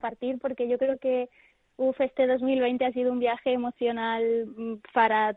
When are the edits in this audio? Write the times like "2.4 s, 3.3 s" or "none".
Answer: none